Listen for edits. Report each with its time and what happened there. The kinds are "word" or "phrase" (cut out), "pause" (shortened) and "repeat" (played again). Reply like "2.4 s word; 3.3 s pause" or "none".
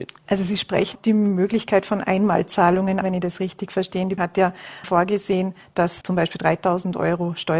0.9 s word; 3.0 s word; 4.2 s word; 4.8 s word; 6.0 s word